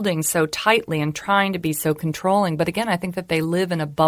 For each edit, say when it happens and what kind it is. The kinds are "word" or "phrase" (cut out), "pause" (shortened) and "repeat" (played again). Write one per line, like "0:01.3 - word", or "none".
none